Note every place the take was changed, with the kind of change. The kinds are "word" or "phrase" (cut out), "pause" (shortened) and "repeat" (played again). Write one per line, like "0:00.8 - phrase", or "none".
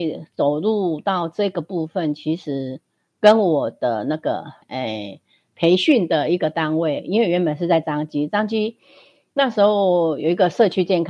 0:04.6 - pause